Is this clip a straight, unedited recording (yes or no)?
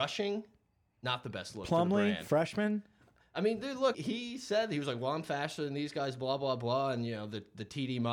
no